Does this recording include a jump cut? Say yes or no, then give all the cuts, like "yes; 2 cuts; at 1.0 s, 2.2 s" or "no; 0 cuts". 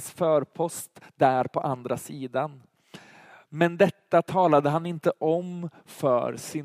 no; 0 cuts